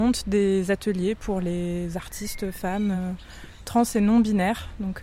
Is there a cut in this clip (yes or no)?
no